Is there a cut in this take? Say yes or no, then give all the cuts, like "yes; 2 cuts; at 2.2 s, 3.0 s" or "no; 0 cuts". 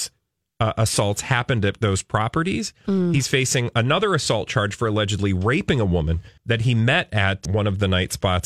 yes; 2 cuts; at 6.4 s, 7.4 s